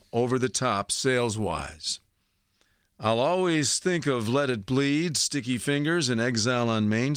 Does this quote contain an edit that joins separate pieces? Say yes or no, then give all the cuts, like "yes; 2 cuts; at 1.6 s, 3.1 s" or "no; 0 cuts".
no; 0 cuts